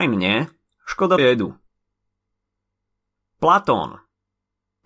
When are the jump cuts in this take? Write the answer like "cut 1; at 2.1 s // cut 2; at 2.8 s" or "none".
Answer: cut 1; at 1.2 s